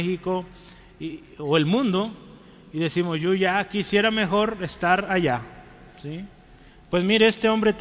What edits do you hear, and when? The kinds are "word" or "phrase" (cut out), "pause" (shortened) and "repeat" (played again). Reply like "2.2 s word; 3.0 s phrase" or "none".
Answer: none